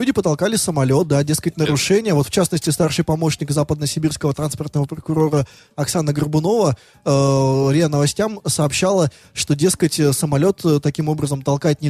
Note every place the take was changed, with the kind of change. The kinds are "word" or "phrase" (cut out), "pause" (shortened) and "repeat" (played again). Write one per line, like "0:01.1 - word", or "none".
none